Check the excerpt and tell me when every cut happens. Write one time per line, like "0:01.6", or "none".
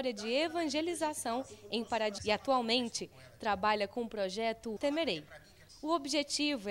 0:02.2
0:04.8